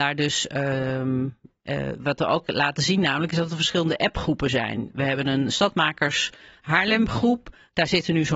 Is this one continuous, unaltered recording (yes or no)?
yes